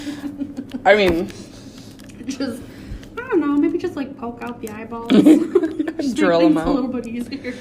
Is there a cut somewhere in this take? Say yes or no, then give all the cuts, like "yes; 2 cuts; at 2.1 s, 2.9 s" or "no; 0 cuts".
no; 0 cuts